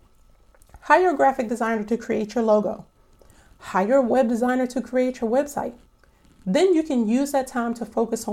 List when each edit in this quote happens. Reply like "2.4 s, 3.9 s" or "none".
none